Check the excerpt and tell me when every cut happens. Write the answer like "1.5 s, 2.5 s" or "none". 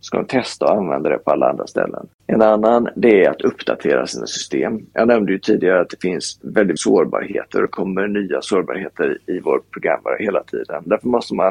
2.2 s, 6.8 s